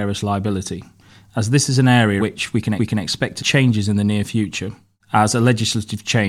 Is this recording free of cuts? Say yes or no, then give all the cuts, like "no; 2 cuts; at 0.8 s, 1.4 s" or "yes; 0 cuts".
no; 3 cuts; at 2.2 s, 2.8 s, 3.4 s